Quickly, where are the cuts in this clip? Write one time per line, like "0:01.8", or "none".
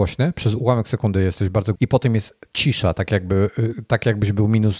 0:01.7

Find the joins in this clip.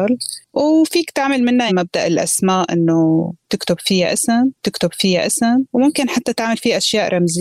0:01.7
0:04.5

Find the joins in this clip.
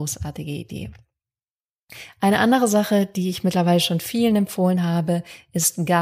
none

